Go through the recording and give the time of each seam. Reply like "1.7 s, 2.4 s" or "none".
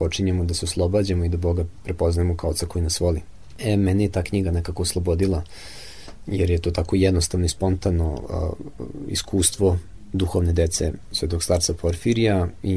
none